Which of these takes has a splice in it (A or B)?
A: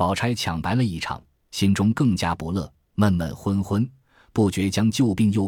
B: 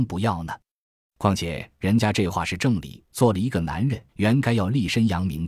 B